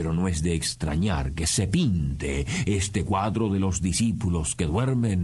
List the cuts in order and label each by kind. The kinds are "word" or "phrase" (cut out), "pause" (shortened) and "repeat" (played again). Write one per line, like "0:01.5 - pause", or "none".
none

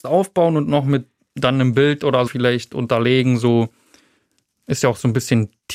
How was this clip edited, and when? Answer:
0:02.3 - word

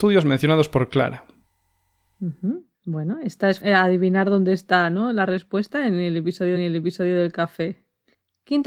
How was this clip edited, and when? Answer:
0:02.7 - pause
0:03.6 - word
0:06.6 - repeat

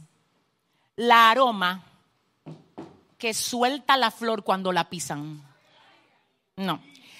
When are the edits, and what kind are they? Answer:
none

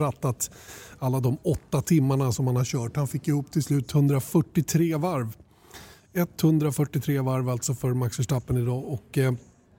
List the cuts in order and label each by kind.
none

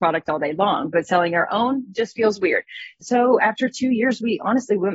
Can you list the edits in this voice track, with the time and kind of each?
none

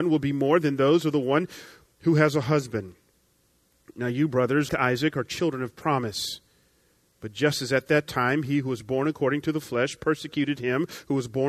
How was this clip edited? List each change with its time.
0:04.7 - word

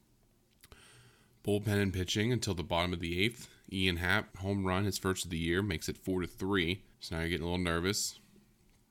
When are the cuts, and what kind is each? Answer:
0:04.3 - pause
0:06.9 - pause

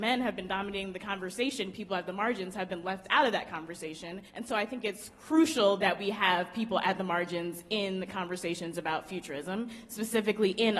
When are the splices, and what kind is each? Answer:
0:04.3 - pause

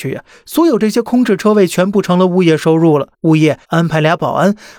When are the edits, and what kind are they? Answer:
0:03.1 - pause
0:03.6 - pause

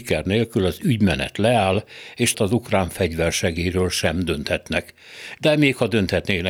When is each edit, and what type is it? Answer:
0:02.3 - phrase

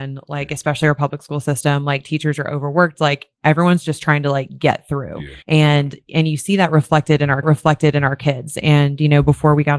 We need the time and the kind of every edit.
0:03.3 - pause
0:05.4 - pause
0:07.4 - repeat

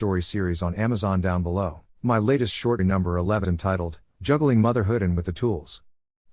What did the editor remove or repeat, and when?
0:01.9 - pause
0:02.8 - word
0:03.4 - word
0:05.2 - word

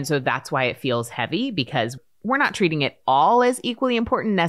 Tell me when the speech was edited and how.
none

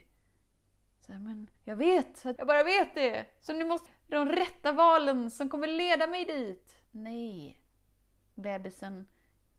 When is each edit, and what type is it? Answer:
0:01.6 - pause
0:02.4 - phrase
0:03.9 - phrase
0:06.8 - pause

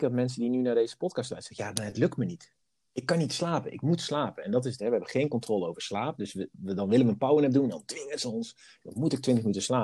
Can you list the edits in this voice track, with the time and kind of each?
none

